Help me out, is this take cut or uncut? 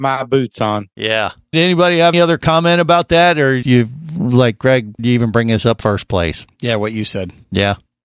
cut